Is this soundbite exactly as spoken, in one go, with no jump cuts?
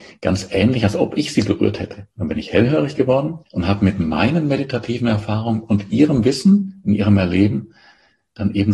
no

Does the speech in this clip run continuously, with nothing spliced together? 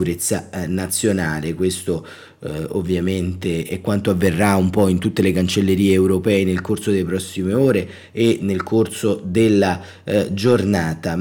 yes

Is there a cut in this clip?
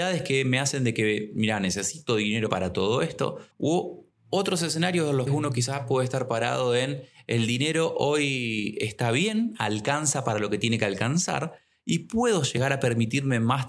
yes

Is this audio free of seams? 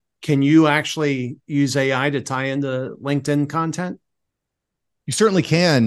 yes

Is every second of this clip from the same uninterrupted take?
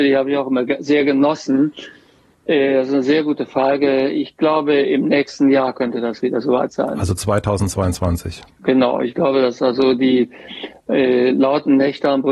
yes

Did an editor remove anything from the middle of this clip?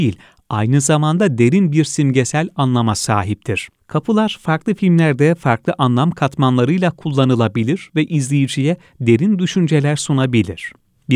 yes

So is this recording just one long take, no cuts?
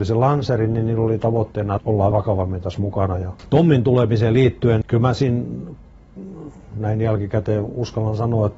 no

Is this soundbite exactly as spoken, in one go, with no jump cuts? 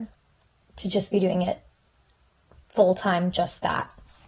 yes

